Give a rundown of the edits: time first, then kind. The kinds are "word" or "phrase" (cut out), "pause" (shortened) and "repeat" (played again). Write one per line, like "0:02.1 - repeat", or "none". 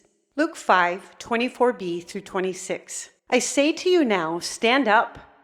0:03.2 - pause